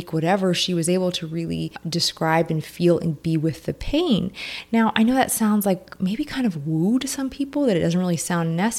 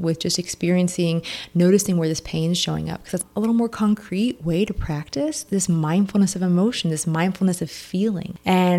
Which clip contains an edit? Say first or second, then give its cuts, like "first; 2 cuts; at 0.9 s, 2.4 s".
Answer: second; 1 cut; at 5.5 s